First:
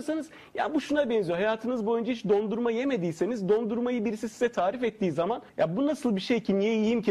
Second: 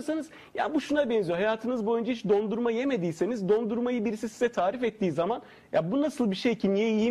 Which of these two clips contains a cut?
first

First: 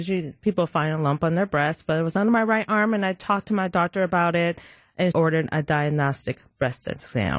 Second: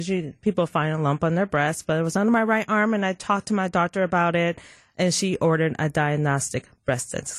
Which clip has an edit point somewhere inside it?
first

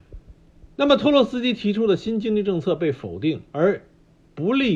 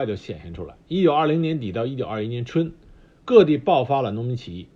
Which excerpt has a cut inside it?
first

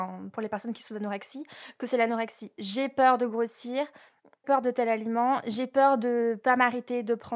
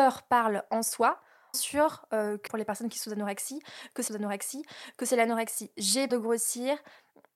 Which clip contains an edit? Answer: second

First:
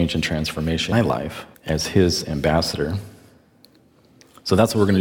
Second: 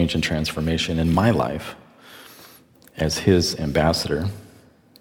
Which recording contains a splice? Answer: first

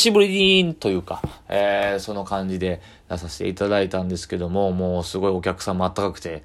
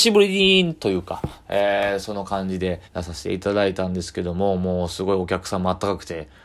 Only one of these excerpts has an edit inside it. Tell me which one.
second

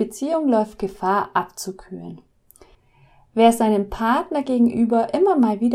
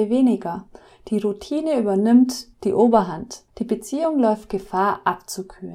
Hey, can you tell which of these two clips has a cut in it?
second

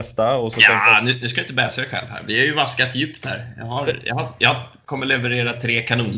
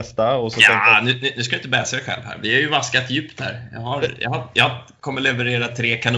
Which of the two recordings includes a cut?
first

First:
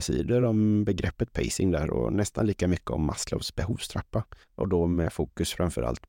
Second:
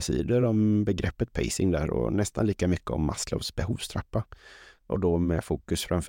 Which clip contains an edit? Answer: first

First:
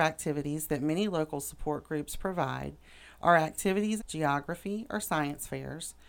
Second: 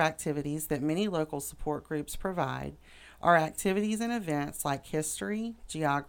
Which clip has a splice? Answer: first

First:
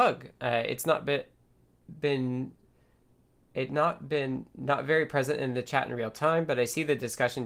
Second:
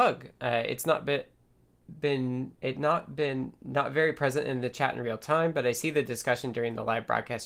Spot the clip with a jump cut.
second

